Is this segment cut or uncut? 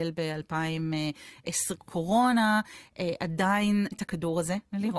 cut